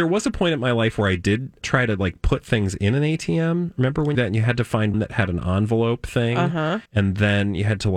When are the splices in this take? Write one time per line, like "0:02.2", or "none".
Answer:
0:01.6
0:04.1
0:04.9
0:06.8